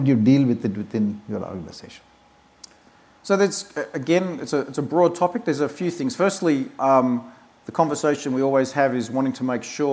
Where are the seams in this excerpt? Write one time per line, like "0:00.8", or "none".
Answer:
none